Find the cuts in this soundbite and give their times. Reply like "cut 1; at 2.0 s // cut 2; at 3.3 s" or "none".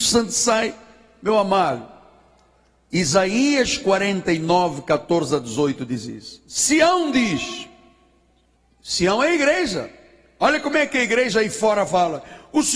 none